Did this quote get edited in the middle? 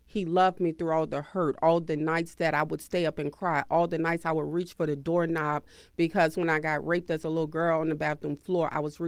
no; 0 cuts

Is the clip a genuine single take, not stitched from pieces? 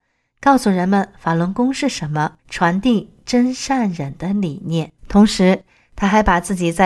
no; 2 cuts; at 2.4 s, 5.0 s

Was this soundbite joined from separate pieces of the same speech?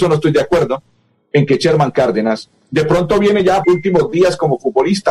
yes; 1 cut; at 3.6 s

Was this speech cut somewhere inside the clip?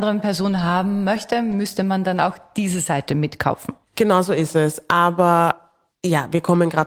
no; 0 cuts

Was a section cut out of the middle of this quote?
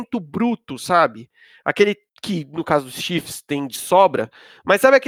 no; 0 cuts

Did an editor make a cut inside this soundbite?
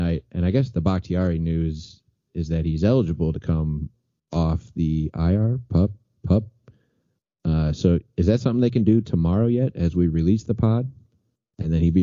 no; 0 cuts

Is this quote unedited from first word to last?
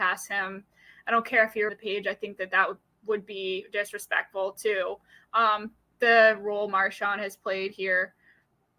no; 1 cut; at 1.7 s

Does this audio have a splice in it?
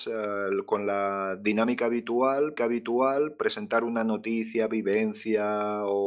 yes; 1 cut; at 2.6 s

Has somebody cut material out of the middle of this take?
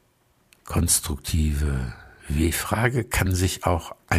no; 0 cuts

